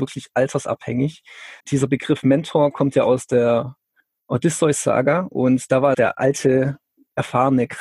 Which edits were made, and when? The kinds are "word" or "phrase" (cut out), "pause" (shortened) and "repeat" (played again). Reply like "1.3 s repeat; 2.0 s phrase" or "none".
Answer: 1.6 s pause; 5.9 s phrase